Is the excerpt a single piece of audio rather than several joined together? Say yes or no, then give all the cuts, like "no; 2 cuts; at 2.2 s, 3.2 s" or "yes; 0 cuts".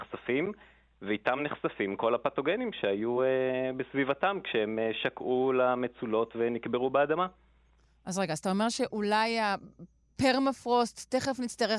yes; 0 cuts